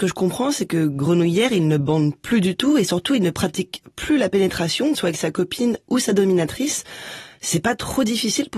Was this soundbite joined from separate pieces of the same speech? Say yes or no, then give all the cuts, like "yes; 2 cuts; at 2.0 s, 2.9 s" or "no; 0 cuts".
yes; 1 cut; at 4.9 s